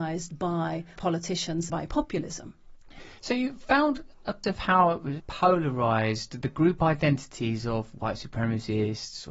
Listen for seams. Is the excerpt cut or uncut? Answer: cut